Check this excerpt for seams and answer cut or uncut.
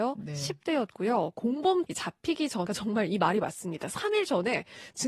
cut